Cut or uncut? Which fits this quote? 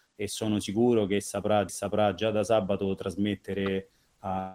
cut